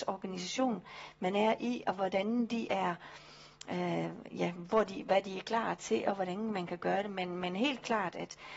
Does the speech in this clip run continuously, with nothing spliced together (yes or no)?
yes